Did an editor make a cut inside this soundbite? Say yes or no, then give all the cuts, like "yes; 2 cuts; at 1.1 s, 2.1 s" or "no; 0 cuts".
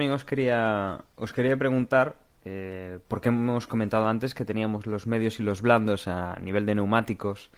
yes; 1 cut; at 1.1 s